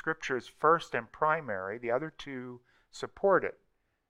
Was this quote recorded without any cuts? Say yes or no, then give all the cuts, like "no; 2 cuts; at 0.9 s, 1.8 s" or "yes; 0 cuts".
yes; 0 cuts